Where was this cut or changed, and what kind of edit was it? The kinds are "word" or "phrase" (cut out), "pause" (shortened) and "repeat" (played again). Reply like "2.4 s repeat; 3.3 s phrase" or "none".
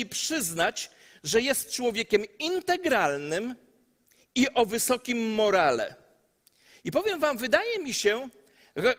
none

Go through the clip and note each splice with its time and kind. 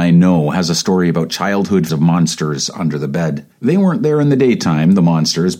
1.9 s word; 3.5 s pause

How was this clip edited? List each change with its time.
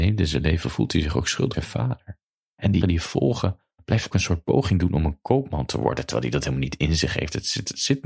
1.5 s word; 2.5 s pause; 2.8 s word; 4.1 s phrase

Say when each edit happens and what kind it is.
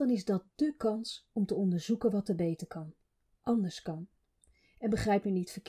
none

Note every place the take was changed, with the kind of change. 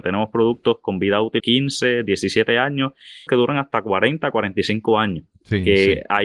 1.4 s word; 3.3 s phrase

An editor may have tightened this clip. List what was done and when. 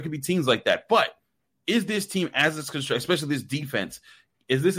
none

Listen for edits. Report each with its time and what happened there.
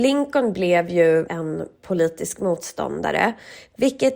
1.3 s phrase

